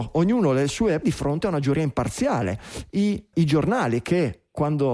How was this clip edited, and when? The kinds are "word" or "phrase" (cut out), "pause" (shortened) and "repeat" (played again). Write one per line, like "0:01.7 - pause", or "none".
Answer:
0:01.0 - word
0:03.3 - word